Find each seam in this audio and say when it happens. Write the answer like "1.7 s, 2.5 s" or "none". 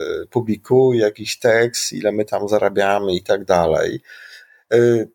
none